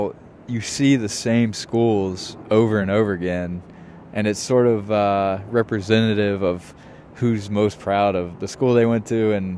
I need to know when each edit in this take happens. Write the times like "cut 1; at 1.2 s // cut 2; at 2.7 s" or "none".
none

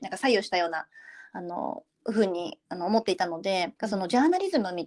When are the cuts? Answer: cut 1; at 3.8 s

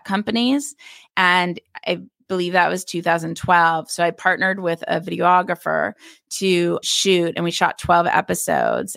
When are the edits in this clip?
cut 1; at 6.8 s

